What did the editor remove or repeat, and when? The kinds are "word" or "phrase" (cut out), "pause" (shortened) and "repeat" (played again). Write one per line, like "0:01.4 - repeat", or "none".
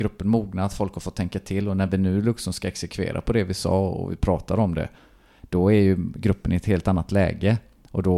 none

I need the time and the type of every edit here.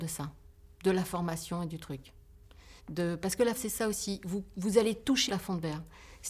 0:02.8 - pause
0:03.6 - word
0:05.3 - word

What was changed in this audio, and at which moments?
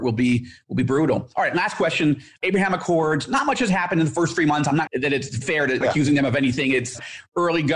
0:04.9 - word
0:05.4 - word
0:05.8 - phrase

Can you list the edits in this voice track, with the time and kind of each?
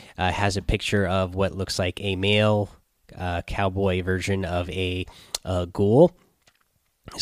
none

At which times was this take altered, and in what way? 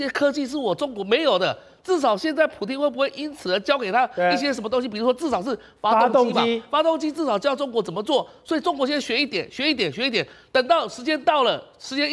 none

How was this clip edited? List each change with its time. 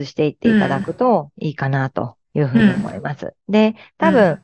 0:02.2 - pause
0:03.4 - pause

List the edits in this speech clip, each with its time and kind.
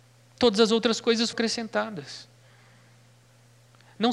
0:01.3 - word

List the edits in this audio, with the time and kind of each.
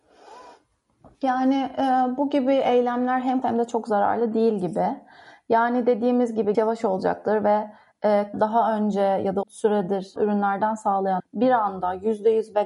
0:01.1 - pause
0:03.4 - word
0:06.5 - word
0:08.3 - word
0:09.4 - word
0:10.2 - word
0:11.2 - word

